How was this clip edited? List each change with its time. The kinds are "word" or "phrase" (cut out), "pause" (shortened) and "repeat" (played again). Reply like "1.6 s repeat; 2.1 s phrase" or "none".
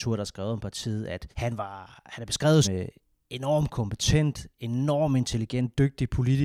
1.3 s pause; 2.6 s word